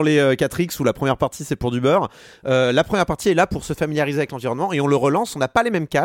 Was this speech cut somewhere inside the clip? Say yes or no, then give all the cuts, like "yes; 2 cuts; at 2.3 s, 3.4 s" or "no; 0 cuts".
no; 0 cuts